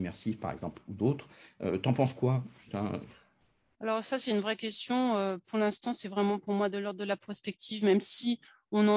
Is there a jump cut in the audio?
no; 0 cuts

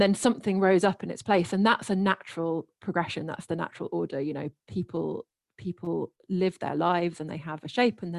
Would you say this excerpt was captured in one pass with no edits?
yes; 0 cuts

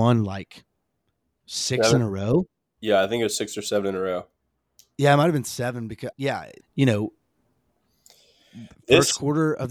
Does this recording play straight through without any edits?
no; 2 cuts; at 6.1 s, 6.6 s

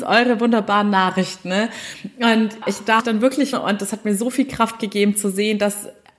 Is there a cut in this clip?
yes; 3 cuts; at 2.6 s, 3.0 s, 3.5 s

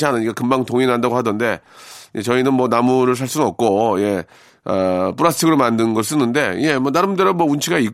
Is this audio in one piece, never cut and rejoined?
yes; 0 cuts

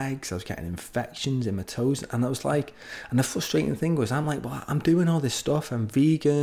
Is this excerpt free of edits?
yes; 0 cuts

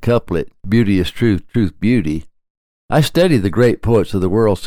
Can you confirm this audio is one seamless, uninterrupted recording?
yes; 0 cuts

